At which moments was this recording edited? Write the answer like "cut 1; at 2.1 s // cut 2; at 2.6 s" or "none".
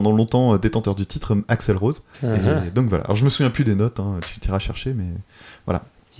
cut 1; at 2.1 s